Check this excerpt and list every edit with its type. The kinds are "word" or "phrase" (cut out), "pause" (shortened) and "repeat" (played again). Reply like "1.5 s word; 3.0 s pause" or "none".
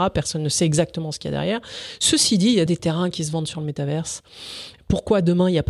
2.7 s word